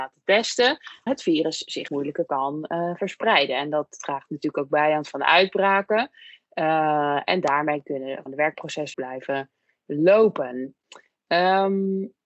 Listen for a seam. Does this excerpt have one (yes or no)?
yes